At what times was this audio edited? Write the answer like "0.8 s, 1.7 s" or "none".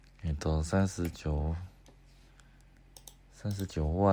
none